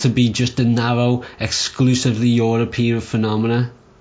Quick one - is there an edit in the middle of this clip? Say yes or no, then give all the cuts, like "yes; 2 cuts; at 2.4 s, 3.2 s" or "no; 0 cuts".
no; 0 cuts